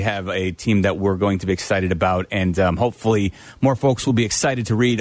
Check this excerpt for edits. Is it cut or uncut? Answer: uncut